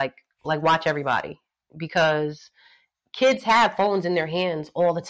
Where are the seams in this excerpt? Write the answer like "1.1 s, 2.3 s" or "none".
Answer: none